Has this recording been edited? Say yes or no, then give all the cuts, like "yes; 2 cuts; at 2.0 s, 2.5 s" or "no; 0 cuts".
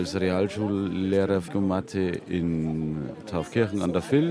yes; 1 cut; at 1.5 s